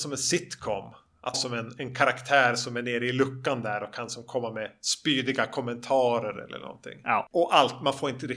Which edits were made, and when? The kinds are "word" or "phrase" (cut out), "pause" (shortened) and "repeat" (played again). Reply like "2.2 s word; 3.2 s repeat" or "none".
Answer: 1.3 s word

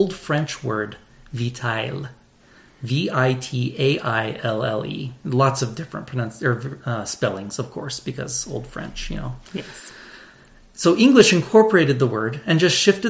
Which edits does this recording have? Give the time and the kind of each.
none

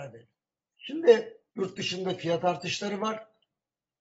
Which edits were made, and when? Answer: 1.5 s pause

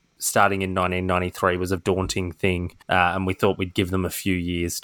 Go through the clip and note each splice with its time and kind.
1.8 s word; 2.8 s pause

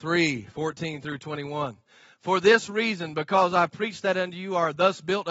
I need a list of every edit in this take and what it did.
none

